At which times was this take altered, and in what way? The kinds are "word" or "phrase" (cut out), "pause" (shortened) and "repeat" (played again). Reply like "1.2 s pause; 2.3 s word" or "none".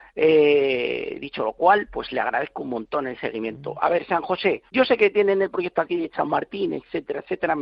4.7 s pause